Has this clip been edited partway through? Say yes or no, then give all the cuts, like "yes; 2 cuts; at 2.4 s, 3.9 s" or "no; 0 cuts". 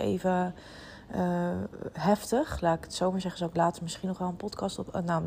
no; 0 cuts